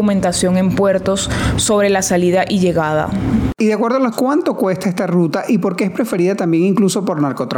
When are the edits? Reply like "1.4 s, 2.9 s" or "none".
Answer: 4.1 s